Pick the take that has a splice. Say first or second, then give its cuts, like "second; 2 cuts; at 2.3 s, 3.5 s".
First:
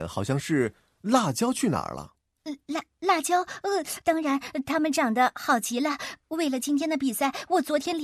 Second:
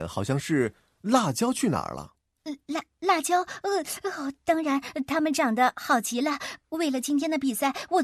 first; 1 cut; at 4.0 s